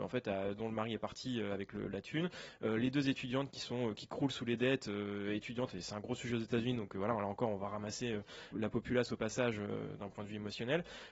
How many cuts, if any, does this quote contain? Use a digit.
1